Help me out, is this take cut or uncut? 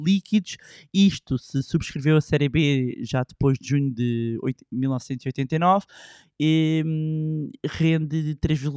uncut